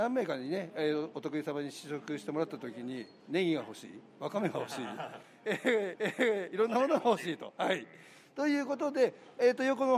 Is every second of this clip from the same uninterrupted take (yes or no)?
no